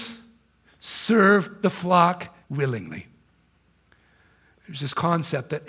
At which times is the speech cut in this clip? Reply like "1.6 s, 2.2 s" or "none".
2.4 s